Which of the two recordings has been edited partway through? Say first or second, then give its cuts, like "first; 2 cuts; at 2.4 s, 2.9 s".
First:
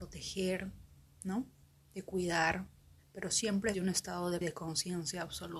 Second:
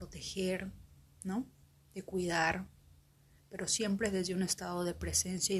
first; 3 cuts; at 3.0 s, 3.7 s, 4.4 s